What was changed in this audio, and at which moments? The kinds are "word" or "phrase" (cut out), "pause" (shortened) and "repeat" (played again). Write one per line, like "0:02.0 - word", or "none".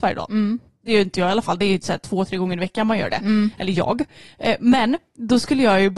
none